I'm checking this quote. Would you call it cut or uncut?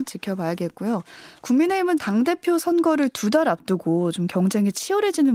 cut